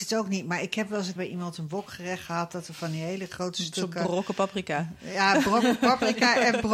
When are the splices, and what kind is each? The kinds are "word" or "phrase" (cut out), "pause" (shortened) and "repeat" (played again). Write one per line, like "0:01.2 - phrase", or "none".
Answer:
0:01.2 - word

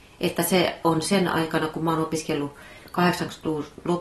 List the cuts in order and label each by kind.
none

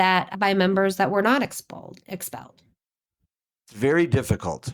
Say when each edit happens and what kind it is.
none

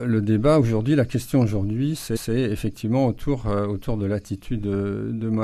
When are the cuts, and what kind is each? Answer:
0:02.2 - repeat

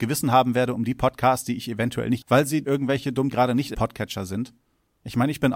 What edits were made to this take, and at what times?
0:02.2 - word
0:02.6 - word
0:03.3 - word
0:03.7 - word

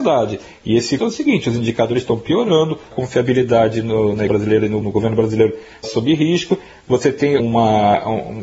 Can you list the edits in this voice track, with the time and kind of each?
0:01.0 - word
0:02.9 - word
0:04.3 - word
0:04.8 - word
0:05.8 - word
0:07.4 - word

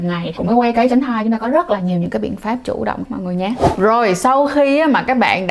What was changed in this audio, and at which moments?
0:03.0 - word

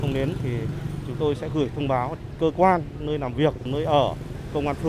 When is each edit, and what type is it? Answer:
none

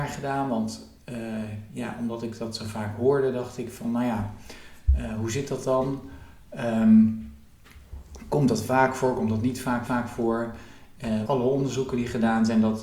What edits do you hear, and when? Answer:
0:09.9 - repeat
0:11.3 - phrase

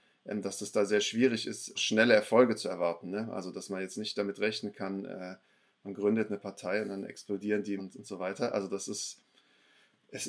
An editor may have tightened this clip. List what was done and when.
0:01.8 - word
0:07.8 - word

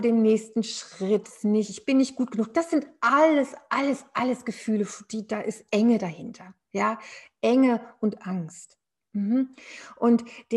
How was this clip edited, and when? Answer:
0:01.2 - phrase

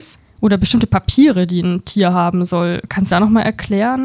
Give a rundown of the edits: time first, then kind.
0:03.1 - phrase

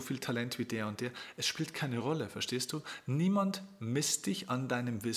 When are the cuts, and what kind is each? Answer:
none

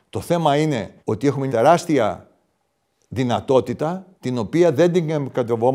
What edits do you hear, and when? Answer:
0:01.0 - pause
0:01.5 - word
0:04.1 - pause

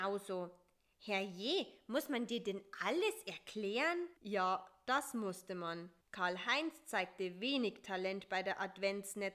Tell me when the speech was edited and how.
0:04.2 - pause
0:06.0 - pause

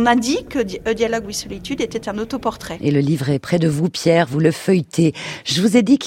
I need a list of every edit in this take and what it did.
none

